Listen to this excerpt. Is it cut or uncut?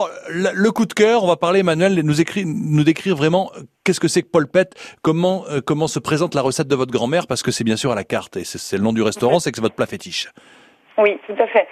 uncut